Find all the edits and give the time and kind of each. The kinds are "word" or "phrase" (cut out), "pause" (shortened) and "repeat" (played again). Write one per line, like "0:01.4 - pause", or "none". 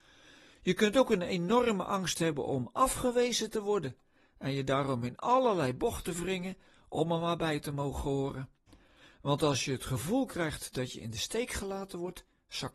none